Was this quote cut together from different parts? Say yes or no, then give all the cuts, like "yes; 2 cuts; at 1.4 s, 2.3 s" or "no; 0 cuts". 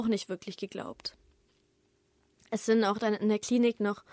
no; 0 cuts